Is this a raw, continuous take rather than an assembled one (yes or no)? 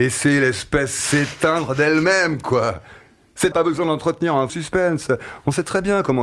no